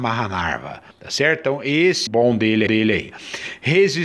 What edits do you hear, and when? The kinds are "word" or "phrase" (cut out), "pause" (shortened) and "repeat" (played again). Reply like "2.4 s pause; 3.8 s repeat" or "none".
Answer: 0.9 s pause; 2.1 s phrase; 2.7 s repeat